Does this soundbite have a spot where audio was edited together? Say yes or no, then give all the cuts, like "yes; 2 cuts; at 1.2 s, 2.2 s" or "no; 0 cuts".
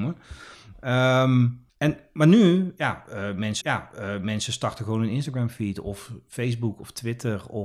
yes; 2 cuts; at 1.7 s, 3.6 s